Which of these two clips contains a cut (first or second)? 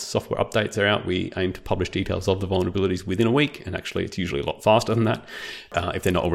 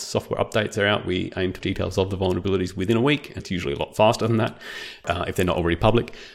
second